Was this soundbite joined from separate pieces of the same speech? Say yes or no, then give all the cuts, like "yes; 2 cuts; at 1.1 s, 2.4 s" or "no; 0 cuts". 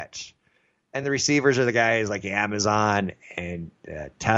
no; 0 cuts